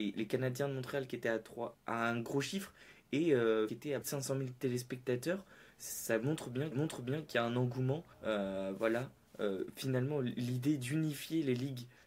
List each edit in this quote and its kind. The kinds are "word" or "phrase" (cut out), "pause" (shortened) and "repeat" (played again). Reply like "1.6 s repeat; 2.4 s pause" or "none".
1.7 s word; 3.7 s phrase; 4.0 s word; 6.7 s repeat; 8.1 s pause